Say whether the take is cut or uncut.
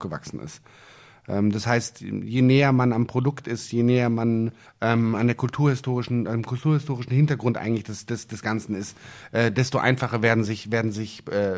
cut